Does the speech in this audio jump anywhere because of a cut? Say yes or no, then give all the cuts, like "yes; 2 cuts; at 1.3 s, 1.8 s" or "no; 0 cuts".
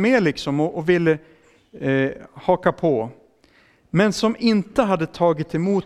no; 0 cuts